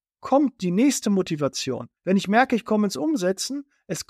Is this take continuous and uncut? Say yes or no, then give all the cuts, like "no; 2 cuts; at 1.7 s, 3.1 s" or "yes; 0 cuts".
no; 1 cut; at 2.0 s